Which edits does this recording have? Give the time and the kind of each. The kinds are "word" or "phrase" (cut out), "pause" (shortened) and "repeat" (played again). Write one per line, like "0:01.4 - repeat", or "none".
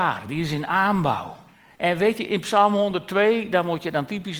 0:01.5 - pause

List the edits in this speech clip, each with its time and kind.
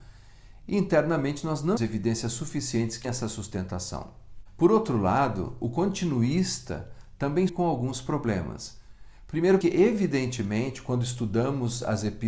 0:01.8 - word
0:03.0 - word
0:07.5 - word
0:09.6 - word

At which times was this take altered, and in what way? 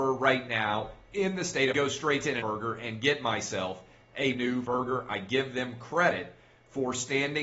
0:01.7 - phrase
0:02.4 - word
0:04.3 - word
0:04.6 - word

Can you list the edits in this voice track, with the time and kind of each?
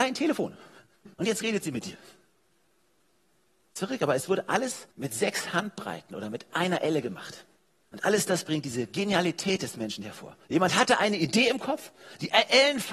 0:01.1 - pause
0:04.9 - pause
0:07.6 - pause
0:10.4 - pause

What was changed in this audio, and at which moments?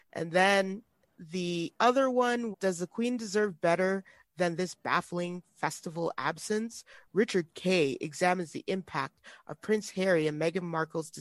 0:02.5 - word

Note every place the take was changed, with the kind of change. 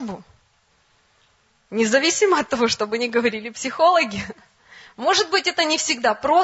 none

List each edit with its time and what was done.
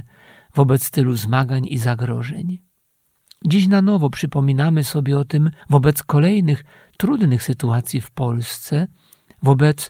0:05.6 - pause

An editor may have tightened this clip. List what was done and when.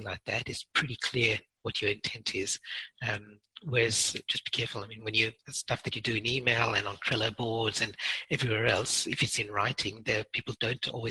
0:05.4 - pause

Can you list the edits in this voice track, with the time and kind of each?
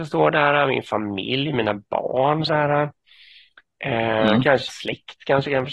0:02.5 - word
0:04.7 - word

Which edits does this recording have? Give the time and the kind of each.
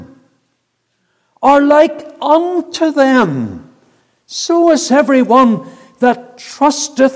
none

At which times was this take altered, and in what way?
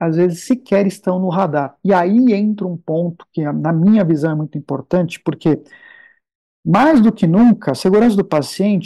none

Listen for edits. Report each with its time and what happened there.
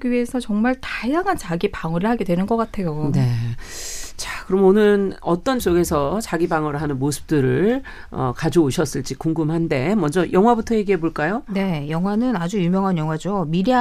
0:05.6 - word

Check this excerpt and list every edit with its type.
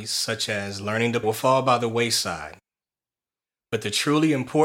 0:01.2 - phrase

